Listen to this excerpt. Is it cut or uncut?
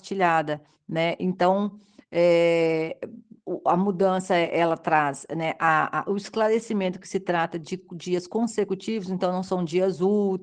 uncut